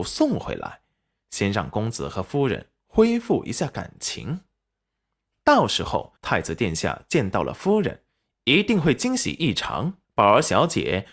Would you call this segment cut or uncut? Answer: cut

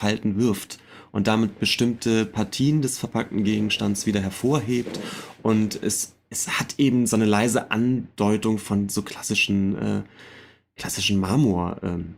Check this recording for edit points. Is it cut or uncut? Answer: uncut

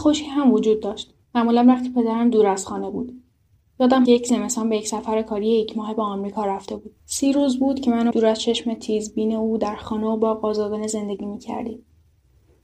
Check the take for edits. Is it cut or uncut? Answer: cut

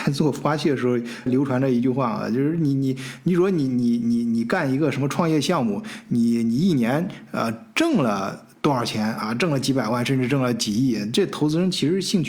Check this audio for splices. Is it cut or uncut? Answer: cut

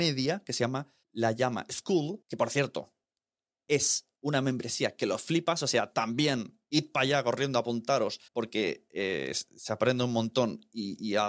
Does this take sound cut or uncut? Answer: cut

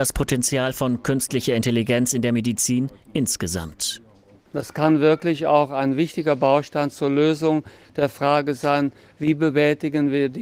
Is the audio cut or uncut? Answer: uncut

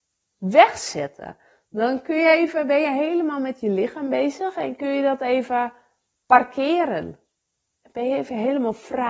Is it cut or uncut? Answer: uncut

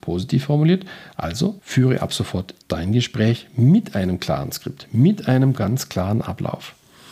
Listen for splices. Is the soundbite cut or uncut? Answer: cut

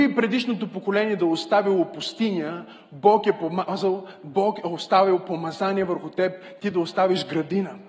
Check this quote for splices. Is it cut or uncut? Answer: uncut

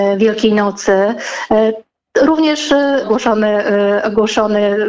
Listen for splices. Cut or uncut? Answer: cut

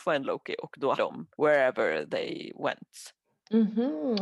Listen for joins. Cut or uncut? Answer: cut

